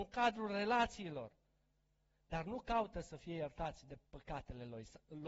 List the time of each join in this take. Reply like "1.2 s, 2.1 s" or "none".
4.1 s